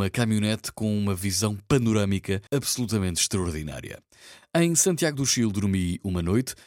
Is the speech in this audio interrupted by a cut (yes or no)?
yes